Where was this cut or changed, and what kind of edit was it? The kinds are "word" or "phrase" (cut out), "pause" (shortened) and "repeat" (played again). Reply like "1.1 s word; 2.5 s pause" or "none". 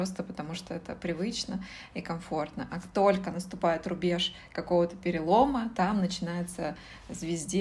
none